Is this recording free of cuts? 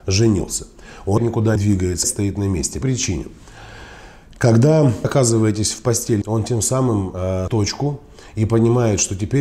no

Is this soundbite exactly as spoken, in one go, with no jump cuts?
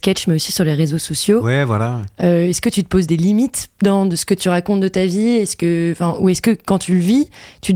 yes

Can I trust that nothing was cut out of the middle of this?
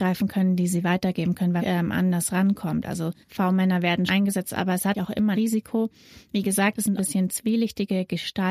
no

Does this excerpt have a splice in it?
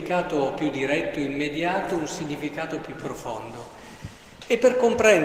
no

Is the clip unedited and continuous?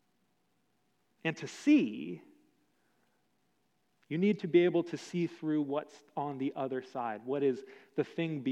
yes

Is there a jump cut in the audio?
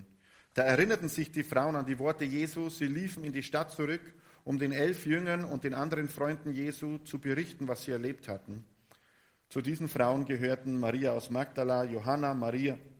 no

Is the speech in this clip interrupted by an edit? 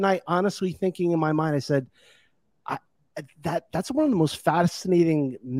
no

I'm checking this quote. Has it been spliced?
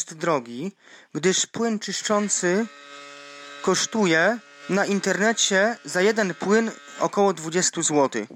no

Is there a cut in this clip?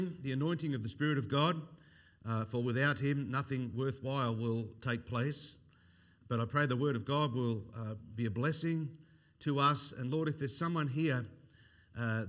no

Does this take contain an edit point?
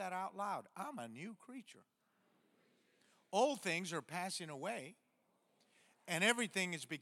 no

